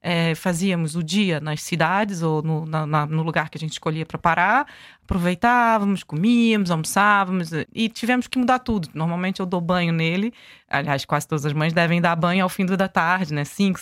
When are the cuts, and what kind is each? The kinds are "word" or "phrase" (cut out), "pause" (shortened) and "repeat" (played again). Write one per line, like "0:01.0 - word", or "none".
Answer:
0:07.7 - word